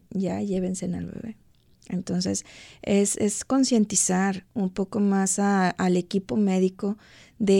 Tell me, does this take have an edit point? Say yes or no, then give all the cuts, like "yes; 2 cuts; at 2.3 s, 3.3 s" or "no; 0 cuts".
no; 0 cuts